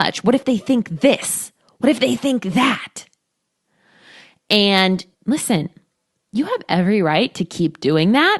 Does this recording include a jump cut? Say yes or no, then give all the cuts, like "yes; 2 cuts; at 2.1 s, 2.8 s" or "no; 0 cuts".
yes; 1 cut; at 5.1 s